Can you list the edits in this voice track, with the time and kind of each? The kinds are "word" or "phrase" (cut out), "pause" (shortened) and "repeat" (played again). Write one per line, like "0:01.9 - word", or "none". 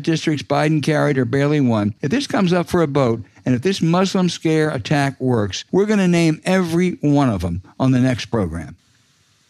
0:02.0 - pause
0:05.7 - pause